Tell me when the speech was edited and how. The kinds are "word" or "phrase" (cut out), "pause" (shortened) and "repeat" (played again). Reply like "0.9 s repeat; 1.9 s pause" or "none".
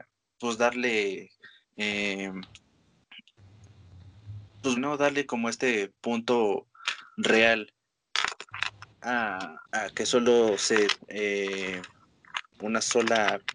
1.6 s pause; 4.8 s word; 9.7 s pause; 11.0 s word; 12.5 s pause